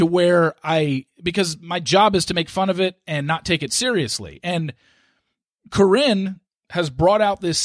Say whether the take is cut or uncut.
uncut